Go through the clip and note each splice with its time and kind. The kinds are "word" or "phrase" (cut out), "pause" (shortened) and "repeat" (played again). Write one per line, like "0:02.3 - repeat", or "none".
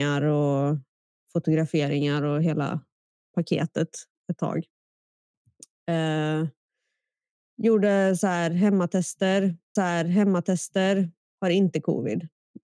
0:09.8 - repeat